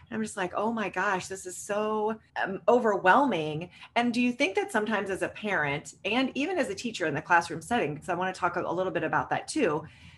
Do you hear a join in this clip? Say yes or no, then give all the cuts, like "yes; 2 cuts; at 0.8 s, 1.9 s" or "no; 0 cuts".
yes; 1 cut; at 2.3 s